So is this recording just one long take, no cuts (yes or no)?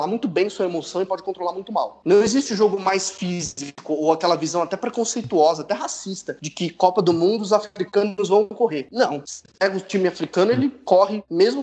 yes